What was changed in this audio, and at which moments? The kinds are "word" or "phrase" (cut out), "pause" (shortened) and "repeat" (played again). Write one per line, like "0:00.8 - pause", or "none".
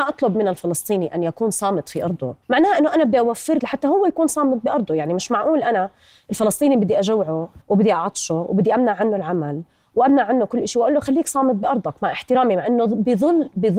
0:02.4 - pause
0:03.6 - phrase
0:07.6 - pause

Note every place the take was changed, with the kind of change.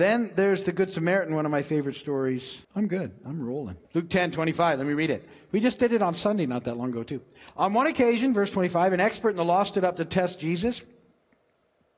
0:02.6 - pause
0:03.8 - pause

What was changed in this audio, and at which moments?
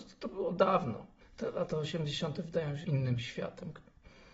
0:01.2 - pause
0:02.8 - phrase

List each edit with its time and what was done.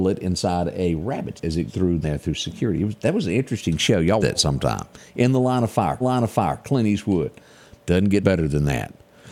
0:01.4 - word
0:01.7 - word
0:02.0 - word
0:04.2 - word
0:06.0 - repeat
0:08.2 - word

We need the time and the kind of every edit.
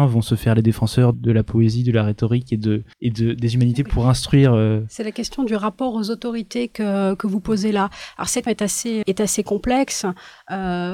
0:01.1 - word
0:02.9 - pause
0:03.9 - word
0:08.5 - word
0:09.0 - word

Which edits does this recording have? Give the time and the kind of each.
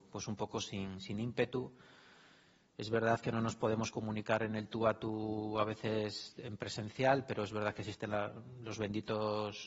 none

